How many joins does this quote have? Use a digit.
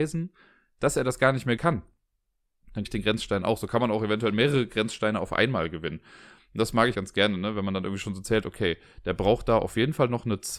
3